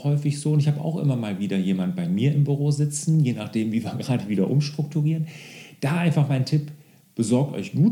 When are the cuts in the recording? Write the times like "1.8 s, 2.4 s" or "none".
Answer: none